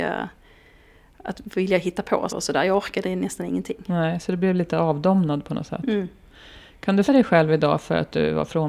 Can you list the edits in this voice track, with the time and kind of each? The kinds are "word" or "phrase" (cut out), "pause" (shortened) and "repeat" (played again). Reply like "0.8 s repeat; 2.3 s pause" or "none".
2.3 s word; 7.0 s word